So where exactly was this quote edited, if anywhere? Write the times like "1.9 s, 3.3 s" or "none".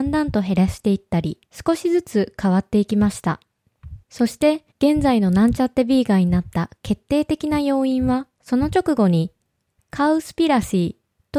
1.5 s, 4.0 s, 4.7 s, 8.3 s